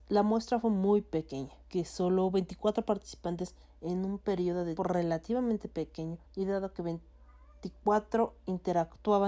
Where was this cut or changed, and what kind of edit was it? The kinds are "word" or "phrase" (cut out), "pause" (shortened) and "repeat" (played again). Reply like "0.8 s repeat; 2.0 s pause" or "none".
1.6 s pause; 3.6 s pause; 4.8 s word; 6.2 s pause